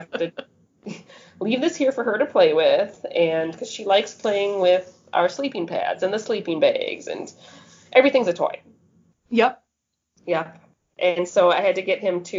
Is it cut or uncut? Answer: uncut